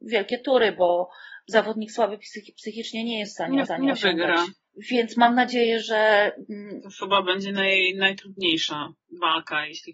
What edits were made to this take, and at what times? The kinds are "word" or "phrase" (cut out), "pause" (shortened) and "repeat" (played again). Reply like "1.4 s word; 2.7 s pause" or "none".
3.7 s repeat

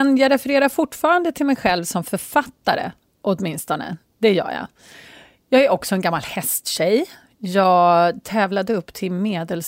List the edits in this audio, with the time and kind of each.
none

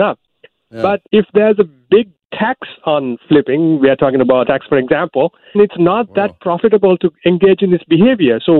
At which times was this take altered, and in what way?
1.1 s pause; 4.4 s phrase; 5.5 s word

